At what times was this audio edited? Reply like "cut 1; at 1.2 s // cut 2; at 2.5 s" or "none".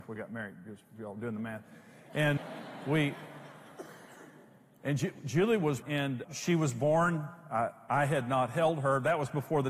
cut 1; at 2.4 s // cut 2; at 5.8 s // cut 3; at 6.2 s